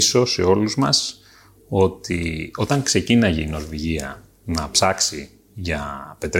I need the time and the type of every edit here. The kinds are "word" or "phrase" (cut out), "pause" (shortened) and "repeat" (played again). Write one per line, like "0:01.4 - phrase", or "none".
none